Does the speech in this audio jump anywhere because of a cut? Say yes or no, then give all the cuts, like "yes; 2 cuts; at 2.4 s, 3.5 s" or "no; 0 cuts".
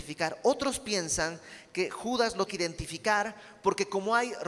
yes; 1 cut; at 2.5 s